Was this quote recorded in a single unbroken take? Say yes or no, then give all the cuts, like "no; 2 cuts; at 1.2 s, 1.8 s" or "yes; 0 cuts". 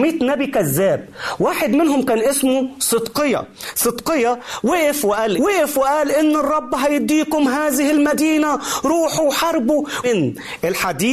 no; 2 cuts; at 5.4 s, 10.0 s